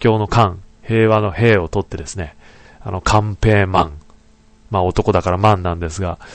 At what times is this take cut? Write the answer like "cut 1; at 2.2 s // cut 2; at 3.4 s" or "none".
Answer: none